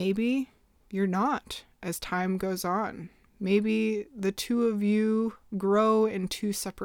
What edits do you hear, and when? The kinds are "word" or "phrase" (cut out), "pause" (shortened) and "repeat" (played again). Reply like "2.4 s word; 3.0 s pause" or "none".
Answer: none